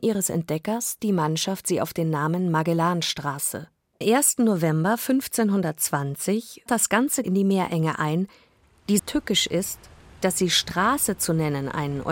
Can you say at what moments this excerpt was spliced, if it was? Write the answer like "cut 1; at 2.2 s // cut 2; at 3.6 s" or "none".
cut 1; at 1.0 s // cut 2; at 4.0 s // cut 3; at 6.7 s // cut 4; at 7.2 s // cut 5; at 9.0 s